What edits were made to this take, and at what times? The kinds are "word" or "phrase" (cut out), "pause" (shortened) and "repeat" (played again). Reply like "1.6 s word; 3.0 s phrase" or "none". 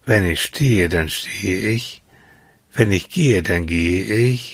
none